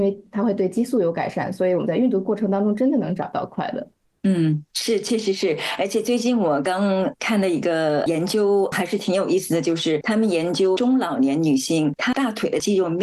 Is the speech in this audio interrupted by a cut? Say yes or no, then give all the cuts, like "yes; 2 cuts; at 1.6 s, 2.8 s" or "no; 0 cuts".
yes; 1 cut; at 4.0 s